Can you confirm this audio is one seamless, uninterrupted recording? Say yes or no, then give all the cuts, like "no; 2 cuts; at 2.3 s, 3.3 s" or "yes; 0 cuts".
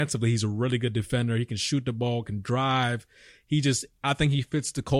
yes; 0 cuts